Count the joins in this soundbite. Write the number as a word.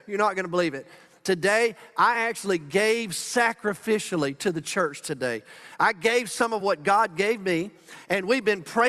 zero